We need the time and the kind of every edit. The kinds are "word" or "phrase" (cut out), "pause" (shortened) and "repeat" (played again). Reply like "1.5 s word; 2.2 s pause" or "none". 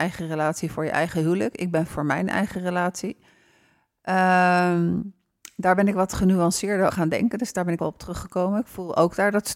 1.9 s word; 6.9 s word; 7.8 s word